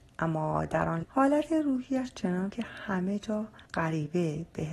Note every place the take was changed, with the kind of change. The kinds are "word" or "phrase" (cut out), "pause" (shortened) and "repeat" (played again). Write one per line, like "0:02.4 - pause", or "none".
0:01.0 - word
0:02.5 - word
0:03.7 - pause